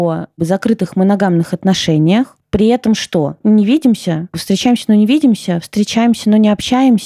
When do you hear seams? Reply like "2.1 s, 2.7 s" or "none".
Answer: none